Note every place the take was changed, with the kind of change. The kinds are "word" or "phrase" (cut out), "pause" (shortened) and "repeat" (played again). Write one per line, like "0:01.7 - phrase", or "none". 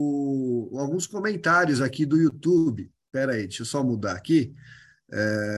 none